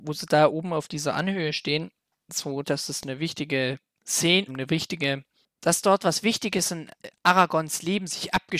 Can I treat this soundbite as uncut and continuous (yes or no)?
no